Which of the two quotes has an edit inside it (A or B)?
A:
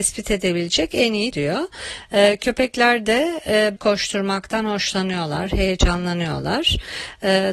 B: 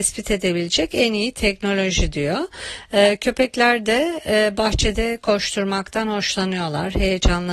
A